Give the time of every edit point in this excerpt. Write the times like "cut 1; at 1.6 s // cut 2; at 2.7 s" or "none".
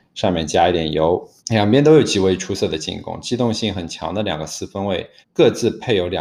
cut 1; at 1.4 s // cut 2; at 5.2 s